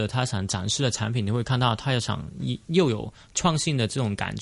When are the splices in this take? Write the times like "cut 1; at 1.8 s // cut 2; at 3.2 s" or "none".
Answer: cut 1; at 2.6 s

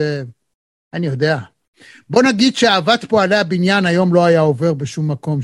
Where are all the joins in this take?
none

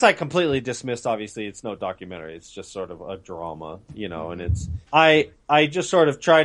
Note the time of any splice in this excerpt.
cut 1; at 4.8 s

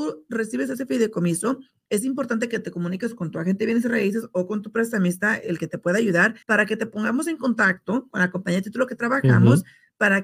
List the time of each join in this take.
cut 1; at 6.4 s

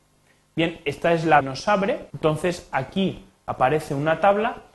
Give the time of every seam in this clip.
cut 1; at 1.4 s // cut 2; at 2.1 s

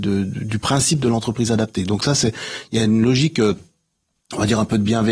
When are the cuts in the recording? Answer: none

